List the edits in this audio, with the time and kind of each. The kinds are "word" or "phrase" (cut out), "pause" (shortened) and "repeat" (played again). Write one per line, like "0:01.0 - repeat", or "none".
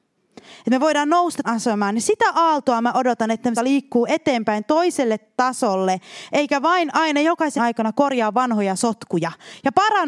0:01.4 - phrase
0:03.6 - word
0:07.6 - word